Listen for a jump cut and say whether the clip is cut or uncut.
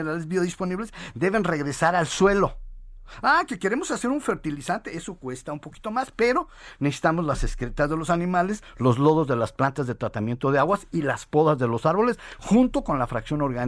uncut